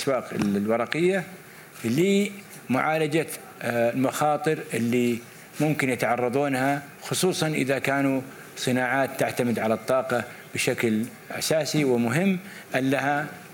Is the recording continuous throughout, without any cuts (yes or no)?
yes